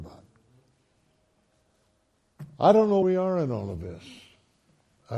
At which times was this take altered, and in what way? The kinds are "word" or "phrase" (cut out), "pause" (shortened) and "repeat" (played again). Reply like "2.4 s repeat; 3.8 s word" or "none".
3.0 s word